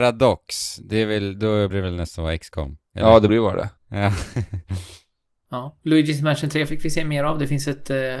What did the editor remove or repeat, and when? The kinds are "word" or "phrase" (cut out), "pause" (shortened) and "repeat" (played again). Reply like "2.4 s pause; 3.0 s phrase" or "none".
1.7 s word; 2.8 s pause; 3.3 s word; 3.8 s pause